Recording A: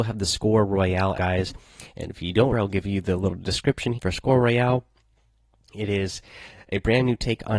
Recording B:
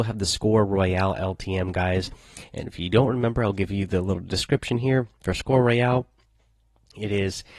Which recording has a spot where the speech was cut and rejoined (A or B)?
A